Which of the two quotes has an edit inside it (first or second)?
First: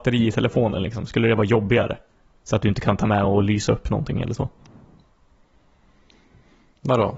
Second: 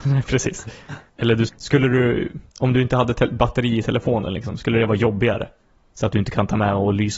second